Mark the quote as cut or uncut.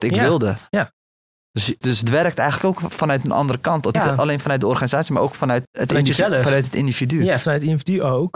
cut